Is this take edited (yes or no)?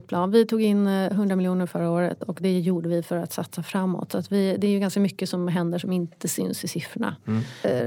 no